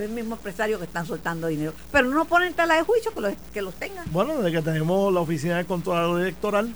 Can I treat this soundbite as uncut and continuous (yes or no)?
yes